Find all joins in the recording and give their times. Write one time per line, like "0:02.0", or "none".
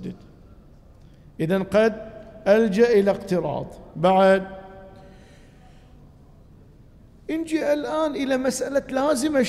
none